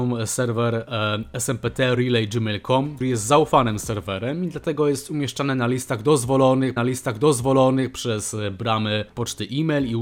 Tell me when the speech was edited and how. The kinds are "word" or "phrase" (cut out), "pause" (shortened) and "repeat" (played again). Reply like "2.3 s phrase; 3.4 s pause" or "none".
3.0 s word; 6.8 s repeat